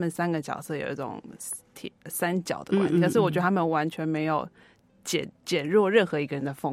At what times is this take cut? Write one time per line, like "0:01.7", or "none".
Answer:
0:05.3